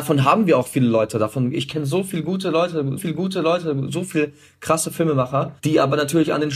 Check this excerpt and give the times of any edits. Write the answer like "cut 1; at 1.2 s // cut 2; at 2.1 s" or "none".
cut 1; at 3.0 s // cut 2; at 5.6 s